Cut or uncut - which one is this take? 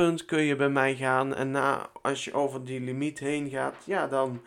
uncut